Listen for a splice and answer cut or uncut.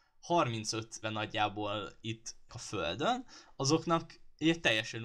cut